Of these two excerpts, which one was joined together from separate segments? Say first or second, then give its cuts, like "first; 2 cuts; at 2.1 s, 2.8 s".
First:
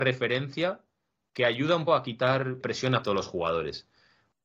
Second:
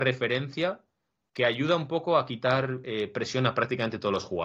first; 3 cuts; at 1.9 s, 2.6 s, 3.0 s